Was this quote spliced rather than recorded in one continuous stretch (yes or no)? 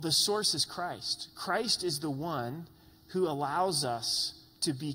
no